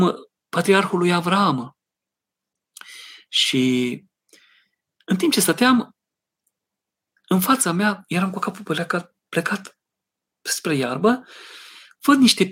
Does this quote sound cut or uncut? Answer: uncut